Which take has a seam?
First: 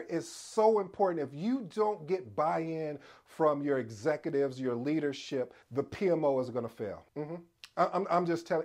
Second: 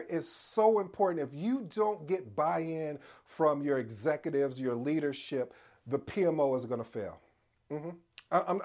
first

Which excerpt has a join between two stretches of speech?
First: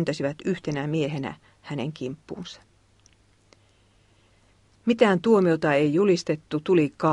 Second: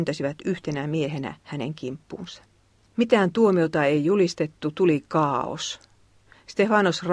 second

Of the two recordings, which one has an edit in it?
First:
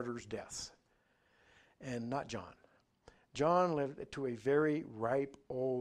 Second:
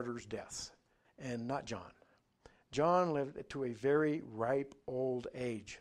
second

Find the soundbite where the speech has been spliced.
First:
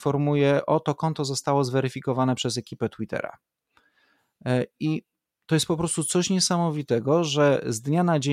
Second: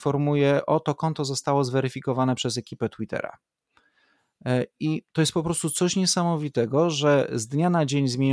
second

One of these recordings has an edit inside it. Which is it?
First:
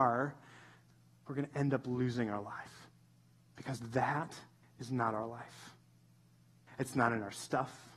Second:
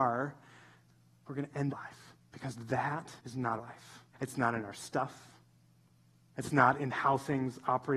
second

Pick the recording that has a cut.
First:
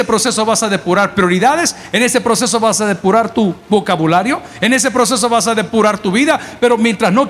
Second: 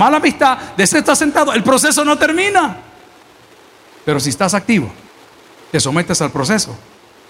second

